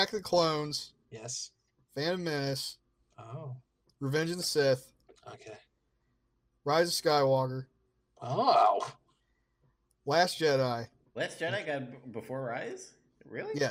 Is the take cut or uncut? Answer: uncut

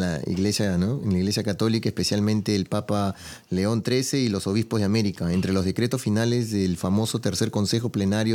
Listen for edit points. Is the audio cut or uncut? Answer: uncut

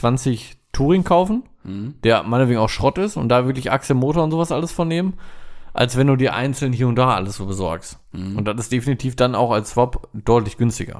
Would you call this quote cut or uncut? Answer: uncut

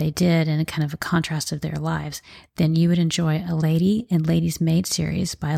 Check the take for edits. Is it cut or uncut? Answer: uncut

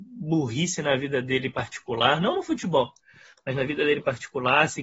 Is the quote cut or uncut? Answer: uncut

